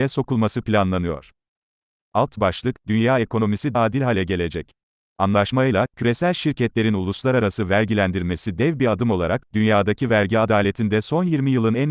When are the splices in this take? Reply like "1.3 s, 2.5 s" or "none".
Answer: 3.7 s